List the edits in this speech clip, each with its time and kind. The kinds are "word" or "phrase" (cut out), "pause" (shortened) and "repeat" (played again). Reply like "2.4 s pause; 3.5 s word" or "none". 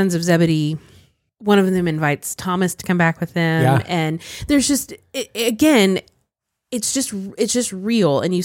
none